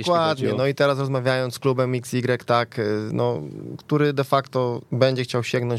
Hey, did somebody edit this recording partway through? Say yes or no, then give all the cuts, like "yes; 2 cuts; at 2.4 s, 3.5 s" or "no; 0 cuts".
yes; 1 cut; at 4.8 s